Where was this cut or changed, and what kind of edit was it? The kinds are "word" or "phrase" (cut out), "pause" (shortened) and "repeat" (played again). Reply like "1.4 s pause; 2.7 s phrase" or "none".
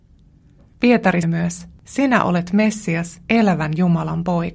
1.2 s word; 1.8 s pause; 3.3 s pause